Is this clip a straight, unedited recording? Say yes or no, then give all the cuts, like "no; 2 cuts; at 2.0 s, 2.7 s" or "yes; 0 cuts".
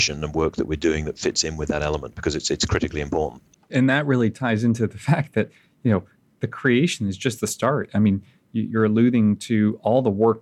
yes; 0 cuts